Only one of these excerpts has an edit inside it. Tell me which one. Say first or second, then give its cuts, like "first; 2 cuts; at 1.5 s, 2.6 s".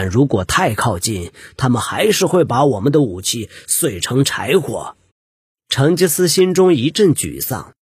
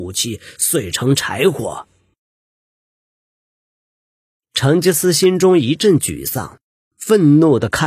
first; 1 cut; at 5.1 s